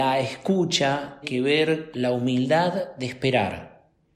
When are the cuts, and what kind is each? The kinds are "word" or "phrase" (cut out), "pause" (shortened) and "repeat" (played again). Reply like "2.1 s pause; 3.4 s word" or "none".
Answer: 1.2 s word; 1.9 s word

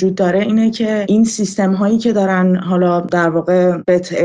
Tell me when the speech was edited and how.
none

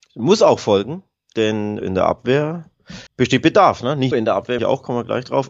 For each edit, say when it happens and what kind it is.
1.8 s word; 3.1 s pause; 4.1 s word; 4.6 s phrase

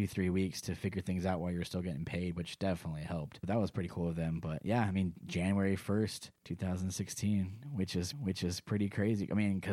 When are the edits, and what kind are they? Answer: 3.4 s phrase; 6.4 s pause; 8.1 s repeat

